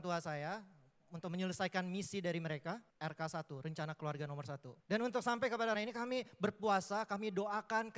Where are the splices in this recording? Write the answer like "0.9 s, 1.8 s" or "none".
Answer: 2.9 s, 4.8 s, 5.7 s

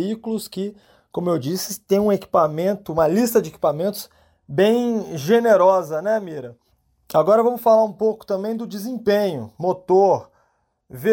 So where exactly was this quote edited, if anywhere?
none

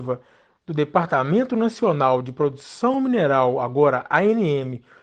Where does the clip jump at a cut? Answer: none

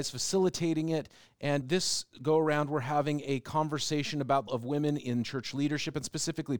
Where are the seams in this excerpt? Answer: 1.6 s, 4.5 s

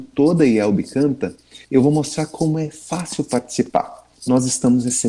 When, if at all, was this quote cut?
1.6 s, 4.1 s

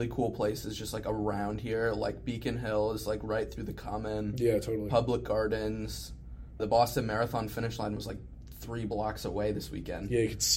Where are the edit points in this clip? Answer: 6.6 s

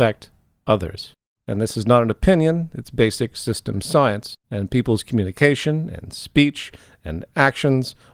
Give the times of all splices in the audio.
1.2 s, 4.4 s

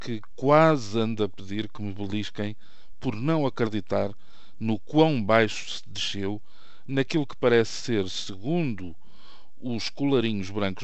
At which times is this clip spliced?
none

